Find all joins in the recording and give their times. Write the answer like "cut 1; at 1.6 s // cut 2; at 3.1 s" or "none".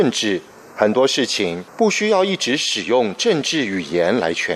cut 1; at 1.7 s